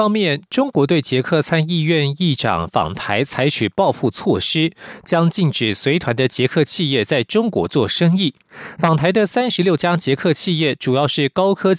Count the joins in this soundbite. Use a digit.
0